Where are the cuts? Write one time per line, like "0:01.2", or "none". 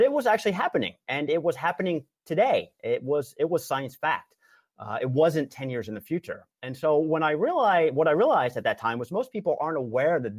none